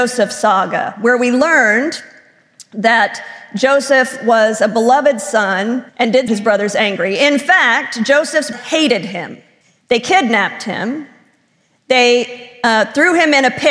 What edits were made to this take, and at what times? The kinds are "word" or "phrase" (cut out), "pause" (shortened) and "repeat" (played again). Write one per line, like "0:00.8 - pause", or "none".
0:05.9 - pause
0:06.3 - phrase
0:08.5 - word
0:09.6 - pause